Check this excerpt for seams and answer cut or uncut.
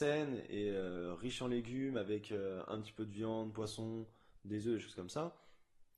uncut